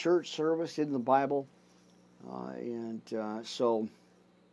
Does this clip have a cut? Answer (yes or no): no